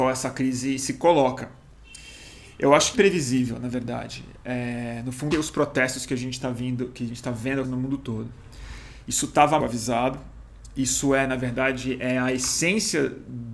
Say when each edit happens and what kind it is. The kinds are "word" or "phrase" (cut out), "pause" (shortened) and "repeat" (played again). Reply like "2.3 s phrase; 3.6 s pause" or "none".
2.9 s phrase; 5.3 s phrase; 7.6 s word; 9.6 s word